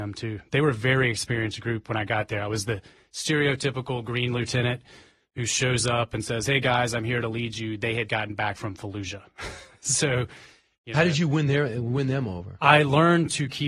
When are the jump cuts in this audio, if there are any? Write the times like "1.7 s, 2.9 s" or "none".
8.1 s